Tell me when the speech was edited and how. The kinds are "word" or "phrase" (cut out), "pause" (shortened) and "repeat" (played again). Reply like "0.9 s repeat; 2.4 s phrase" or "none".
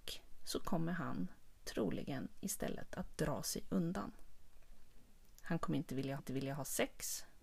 6.2 s repeat